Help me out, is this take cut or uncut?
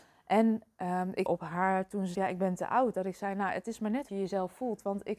cut